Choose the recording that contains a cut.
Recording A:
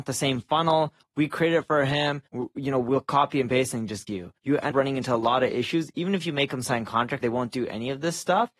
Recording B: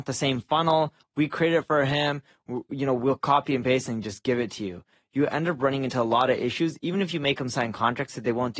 A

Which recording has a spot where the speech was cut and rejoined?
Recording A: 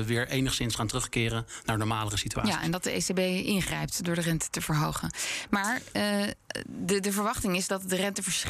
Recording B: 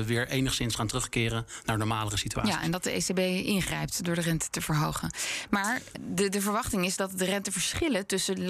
B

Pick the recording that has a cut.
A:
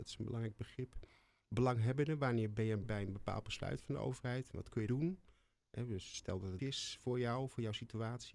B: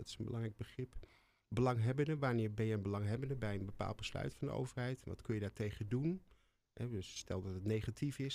A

